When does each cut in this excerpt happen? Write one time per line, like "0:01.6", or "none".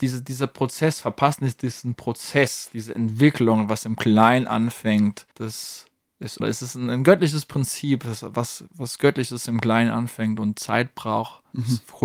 0:05.3
0:06.4